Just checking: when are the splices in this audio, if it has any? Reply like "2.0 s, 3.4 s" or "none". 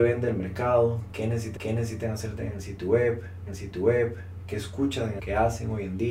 1.6 s, 3.5 s, 5.2 s

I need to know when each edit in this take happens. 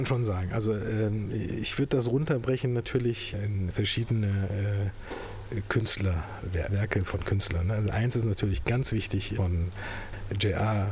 3.7 s, 6.7 s

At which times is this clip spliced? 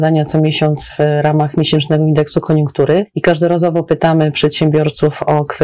none

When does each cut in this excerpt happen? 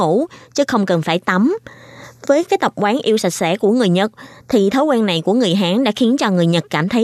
none

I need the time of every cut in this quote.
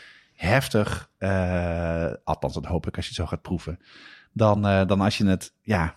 none

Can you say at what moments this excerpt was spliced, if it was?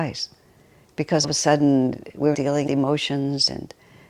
1.2 s, 2.3 s, 2.7 s

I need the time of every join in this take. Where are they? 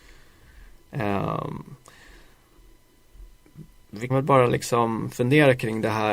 4.1 s

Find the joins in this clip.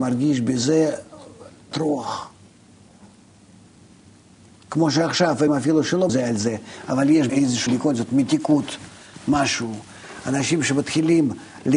1.7 s, 5.5 s, 6.1 s, 7.3 s, 7.7 s

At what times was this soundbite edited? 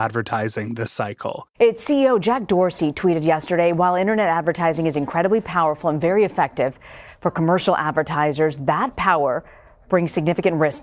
none

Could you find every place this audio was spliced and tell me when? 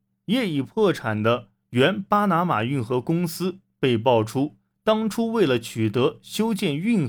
none

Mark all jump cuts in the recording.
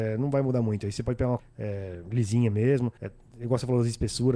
1.4 s, 3.0 s

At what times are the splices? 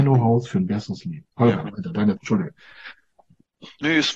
1.3 s, 2.2 s

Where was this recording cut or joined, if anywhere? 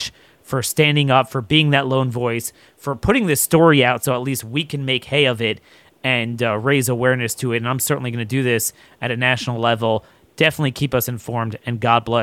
none

